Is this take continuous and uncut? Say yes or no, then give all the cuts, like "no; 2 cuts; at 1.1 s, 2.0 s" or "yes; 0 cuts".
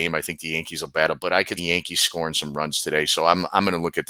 no; 2 cuts; at 1.2 s, 1.6 s